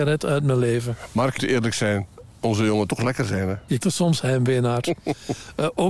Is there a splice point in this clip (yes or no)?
yes